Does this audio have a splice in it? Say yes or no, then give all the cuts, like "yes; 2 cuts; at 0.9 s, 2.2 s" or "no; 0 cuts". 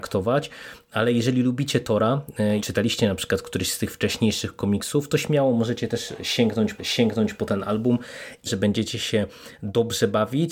yes; 3 cuts; at 2.6 s, 6.8 s, 8.5 s